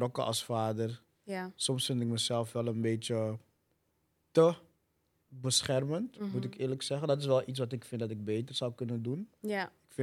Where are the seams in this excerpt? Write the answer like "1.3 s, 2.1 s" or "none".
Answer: 5.2 s